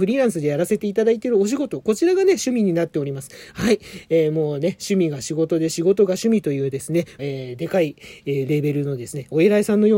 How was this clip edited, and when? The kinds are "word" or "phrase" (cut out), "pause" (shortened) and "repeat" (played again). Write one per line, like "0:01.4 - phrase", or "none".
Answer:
0:07.2 - word